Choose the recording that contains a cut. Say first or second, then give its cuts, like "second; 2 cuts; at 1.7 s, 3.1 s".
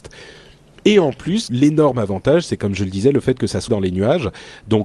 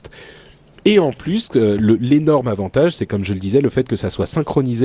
first; 2 cuts; at 1.5 s, 3.7 s